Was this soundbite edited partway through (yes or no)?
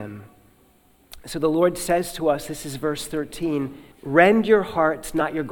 yes